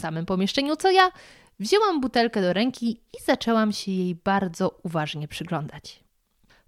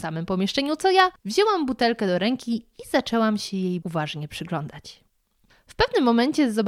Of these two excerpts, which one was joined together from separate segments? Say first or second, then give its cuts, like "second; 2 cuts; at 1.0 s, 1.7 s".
second; 2 cuts; at 1.2 s, 3.8 s